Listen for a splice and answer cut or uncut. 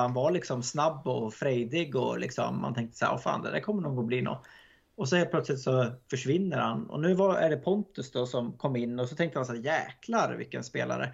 uncut